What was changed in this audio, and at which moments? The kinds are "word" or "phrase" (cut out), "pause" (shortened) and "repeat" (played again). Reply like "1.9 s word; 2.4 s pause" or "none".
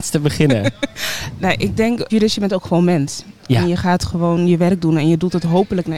2.1 s phrase